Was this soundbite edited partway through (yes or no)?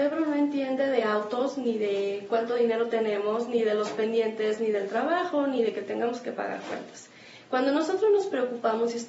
no